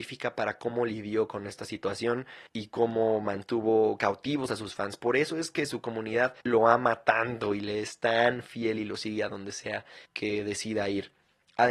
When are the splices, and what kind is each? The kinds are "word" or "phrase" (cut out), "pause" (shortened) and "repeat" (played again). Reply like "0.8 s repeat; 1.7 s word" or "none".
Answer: 2.5 s pause; 6.4 s pause; 10.1 s pause